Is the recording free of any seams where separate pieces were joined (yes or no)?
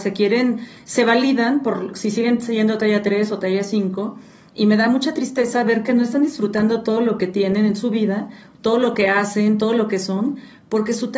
yes